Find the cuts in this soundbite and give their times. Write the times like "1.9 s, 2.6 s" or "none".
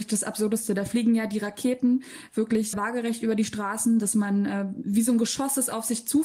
2.7 s

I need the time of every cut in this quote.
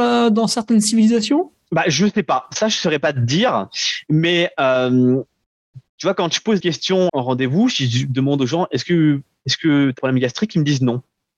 6.6 s, 7.1 s, 10.0 s

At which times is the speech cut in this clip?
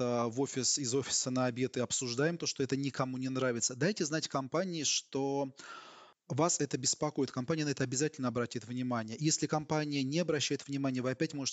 none

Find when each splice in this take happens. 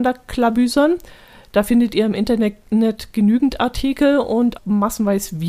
4.6 s

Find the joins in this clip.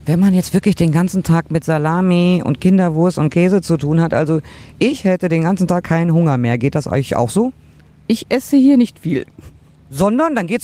none

